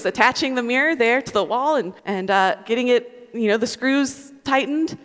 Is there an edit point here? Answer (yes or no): yes